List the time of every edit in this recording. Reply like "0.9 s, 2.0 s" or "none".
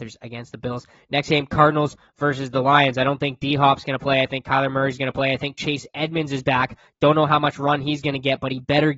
none